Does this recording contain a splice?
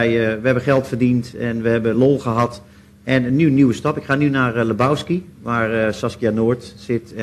no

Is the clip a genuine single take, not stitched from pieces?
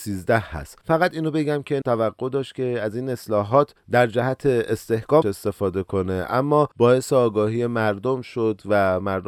no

